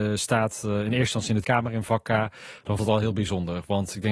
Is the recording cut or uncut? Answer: cut